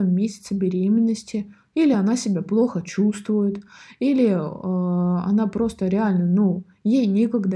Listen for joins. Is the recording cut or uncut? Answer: uncut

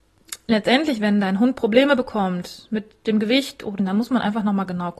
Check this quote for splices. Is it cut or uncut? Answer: cut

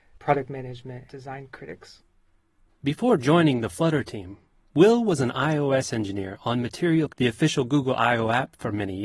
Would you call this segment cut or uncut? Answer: cut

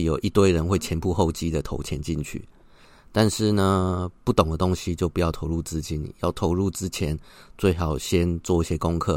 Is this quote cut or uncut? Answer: uncut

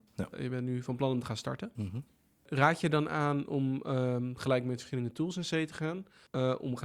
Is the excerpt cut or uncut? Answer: uncut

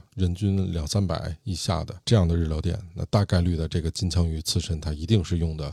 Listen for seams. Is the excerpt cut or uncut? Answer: cut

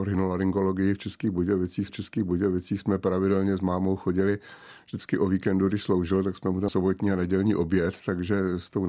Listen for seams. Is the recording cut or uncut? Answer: cut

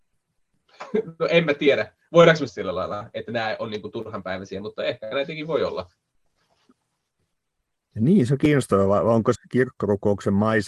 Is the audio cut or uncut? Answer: cut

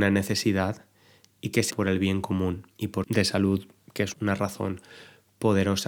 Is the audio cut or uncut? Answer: cut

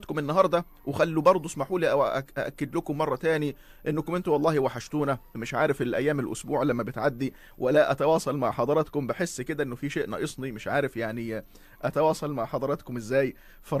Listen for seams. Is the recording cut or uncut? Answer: uncut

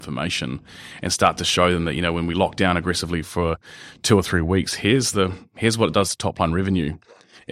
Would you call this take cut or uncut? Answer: uncut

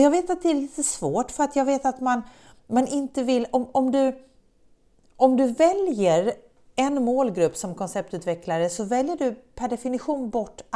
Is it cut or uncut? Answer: uncut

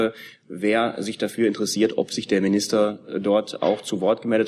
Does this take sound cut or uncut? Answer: uncut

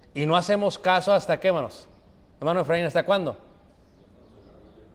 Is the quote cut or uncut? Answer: uncut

